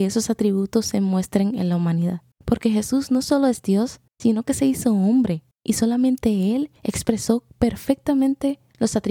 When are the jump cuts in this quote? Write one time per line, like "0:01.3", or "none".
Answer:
0:02.3
0:04.1
0:05.5
0:06.8